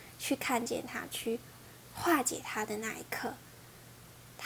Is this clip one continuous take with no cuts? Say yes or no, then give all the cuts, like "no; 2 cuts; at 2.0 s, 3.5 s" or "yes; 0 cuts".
yes; 0 cuts